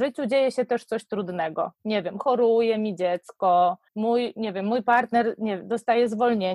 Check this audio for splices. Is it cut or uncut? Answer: cut